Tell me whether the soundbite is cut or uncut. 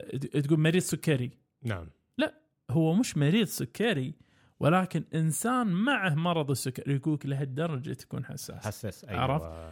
uncut